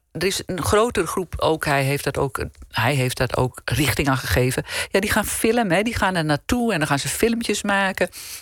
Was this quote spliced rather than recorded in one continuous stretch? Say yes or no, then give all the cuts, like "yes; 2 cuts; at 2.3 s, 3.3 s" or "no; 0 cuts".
no; 0 cuts